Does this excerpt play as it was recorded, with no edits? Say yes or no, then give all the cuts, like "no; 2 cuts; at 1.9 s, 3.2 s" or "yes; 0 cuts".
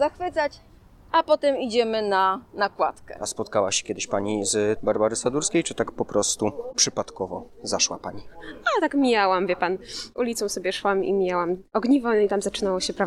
no; 1 cut; at 4.8 s